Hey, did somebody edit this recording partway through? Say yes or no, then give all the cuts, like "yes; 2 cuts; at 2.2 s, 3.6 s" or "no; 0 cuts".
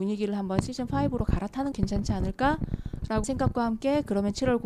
yes; 2 cuts; at 1.7 s, 3.2 s